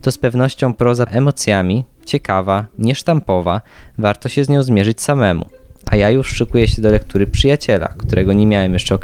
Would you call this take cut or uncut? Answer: cut